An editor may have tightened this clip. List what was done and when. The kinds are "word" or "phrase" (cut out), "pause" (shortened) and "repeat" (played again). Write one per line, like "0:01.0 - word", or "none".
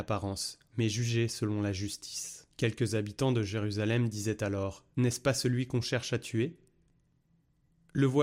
0:02.5 - pause
0:04.9 - pause